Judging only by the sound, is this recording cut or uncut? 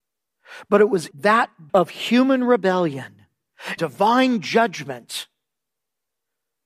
cut